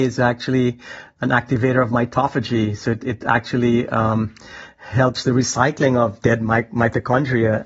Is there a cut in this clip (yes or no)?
no